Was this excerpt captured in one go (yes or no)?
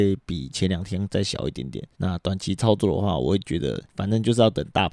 no